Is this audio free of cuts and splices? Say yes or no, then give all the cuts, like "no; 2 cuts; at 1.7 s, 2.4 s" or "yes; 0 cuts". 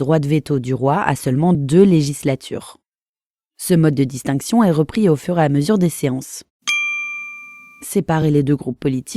yes; 0 cuts